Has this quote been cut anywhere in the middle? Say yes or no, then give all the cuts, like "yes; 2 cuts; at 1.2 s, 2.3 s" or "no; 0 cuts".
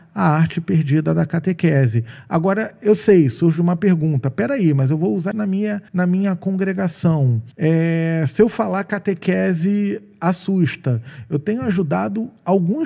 yes; 3 cuts; at 5.3 s, 5.9 s, 7.5 s